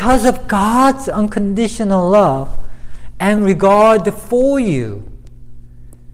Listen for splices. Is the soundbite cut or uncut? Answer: uncut